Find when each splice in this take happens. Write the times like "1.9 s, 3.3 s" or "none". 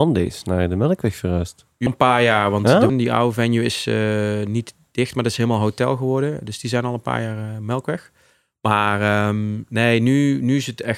1.9 s, 2.9 s